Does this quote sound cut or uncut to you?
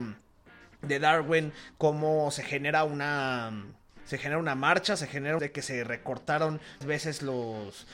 cut